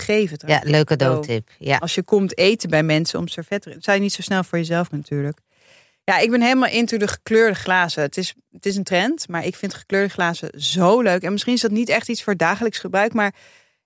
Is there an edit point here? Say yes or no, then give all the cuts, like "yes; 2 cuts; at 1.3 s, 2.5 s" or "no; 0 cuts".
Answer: yes; 1 cut; at 4.9 s